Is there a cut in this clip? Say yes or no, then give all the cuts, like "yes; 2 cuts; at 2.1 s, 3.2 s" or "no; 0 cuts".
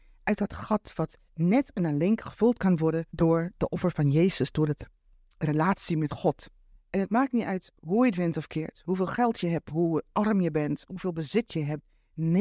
yes; 3 cuts; at 1.3 s, 3.1 s, 6.7 s